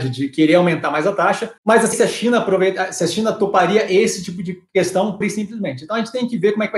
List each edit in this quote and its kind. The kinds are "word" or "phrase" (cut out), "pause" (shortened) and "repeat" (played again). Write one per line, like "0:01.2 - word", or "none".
0:01.6 - pause
0:01.9 - phrase
0:05.2 - word